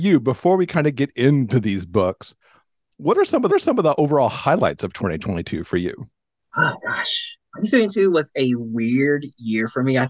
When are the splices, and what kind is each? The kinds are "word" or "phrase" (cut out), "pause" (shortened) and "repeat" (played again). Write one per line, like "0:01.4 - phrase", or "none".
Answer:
0:03.5 - repeat